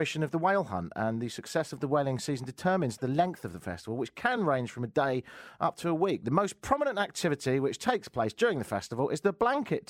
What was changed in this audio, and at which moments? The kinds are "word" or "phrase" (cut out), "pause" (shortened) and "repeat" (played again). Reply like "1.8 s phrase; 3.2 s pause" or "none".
none

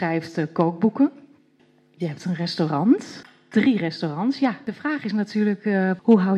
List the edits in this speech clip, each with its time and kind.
none

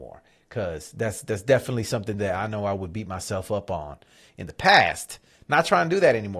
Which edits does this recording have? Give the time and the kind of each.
none

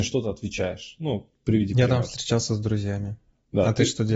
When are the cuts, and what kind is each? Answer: none

